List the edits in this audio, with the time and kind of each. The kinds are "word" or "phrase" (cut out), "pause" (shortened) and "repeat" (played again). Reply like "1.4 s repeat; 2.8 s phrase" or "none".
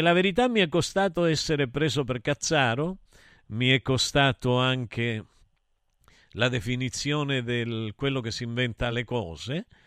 none